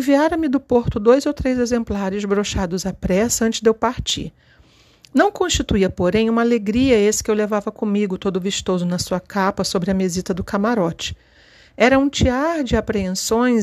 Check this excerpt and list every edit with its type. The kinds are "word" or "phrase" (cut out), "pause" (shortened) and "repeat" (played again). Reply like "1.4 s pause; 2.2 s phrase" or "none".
none